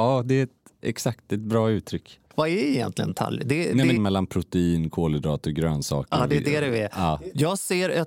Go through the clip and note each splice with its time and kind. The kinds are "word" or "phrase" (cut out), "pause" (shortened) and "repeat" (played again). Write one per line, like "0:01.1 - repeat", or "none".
0:02.3 - pause
0:04.0 - phrase

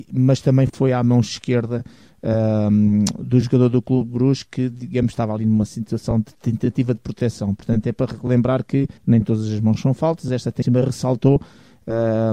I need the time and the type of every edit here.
0:09.0 - pause

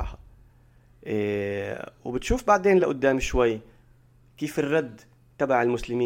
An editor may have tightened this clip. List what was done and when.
none

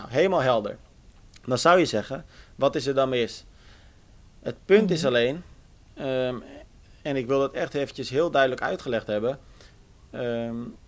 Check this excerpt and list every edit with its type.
none

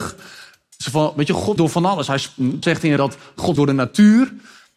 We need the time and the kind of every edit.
0:01.6 - word
0:02.6 - word
0:03.0 - word
0:03.6 - word

